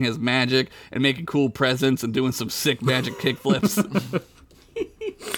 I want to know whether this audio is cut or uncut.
uncut